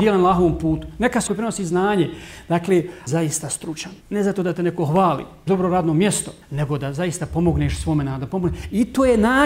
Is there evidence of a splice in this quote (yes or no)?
yes